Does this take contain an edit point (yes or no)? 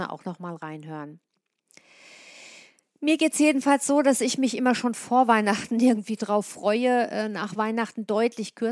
no